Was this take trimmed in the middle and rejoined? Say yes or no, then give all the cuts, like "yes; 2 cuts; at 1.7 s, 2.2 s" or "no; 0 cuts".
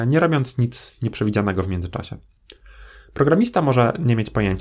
no; 0 cuts